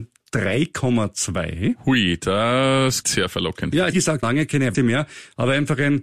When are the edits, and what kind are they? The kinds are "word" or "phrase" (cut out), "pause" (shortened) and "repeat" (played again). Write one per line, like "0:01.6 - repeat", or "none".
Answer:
0:03.0 - word
0:03.9 - word
0:04.2 - word
0:04.7 - word

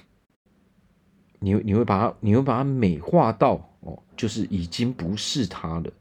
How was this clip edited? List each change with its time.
0:04.1 - pause

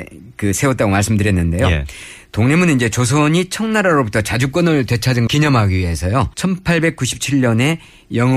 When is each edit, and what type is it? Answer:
0:05.3 - word
0:06.3 - pause

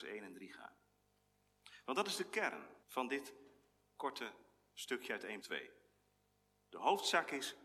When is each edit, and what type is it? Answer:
0:02.8 - pause
0:05.4 - word

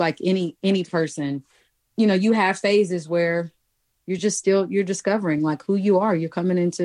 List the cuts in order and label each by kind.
none

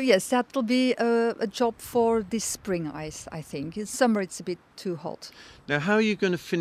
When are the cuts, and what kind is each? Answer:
none

